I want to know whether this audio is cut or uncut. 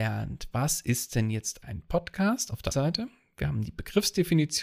cut